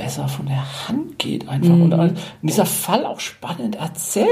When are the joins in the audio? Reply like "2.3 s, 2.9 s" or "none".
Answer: none

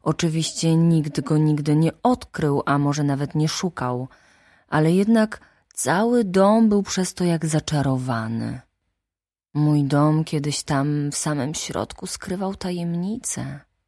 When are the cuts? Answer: none

